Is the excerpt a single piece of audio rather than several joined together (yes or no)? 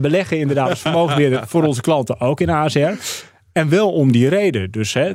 yes